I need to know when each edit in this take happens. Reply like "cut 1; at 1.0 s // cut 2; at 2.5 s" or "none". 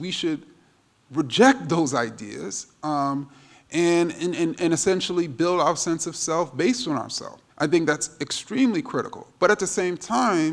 cut 1; at 7.5 s